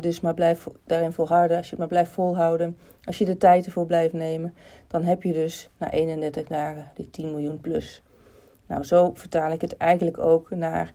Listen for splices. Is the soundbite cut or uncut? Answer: uncut